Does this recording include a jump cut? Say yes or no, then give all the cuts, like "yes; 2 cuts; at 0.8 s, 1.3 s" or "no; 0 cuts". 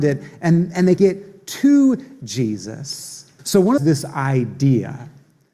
yes; 3 cuts; at 1.0 s, 3.4 s, 3.8 s